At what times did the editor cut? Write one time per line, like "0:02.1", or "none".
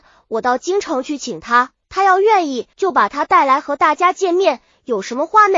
0:01.8
0:02.7